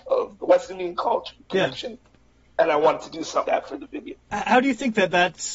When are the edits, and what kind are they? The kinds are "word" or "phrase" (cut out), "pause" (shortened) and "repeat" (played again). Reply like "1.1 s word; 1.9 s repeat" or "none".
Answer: 3.4 s word; 4.2 s pause